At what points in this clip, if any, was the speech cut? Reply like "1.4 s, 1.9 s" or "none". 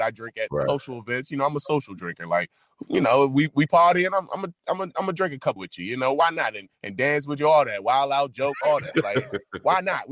5.6 s, 6.7 s